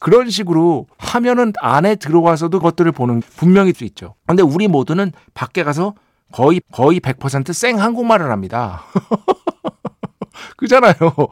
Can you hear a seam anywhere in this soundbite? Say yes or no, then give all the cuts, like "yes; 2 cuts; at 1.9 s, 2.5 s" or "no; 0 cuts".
yes; 6 cuts; at 0.9 s, 2.6 s, 3.2 s, 3.7 s, 4.2 s, 6.6 s